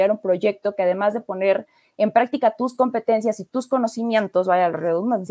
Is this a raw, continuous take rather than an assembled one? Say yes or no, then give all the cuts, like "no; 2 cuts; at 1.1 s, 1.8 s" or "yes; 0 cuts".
yes; 0 cuts